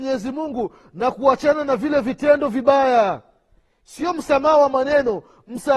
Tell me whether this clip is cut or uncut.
uncut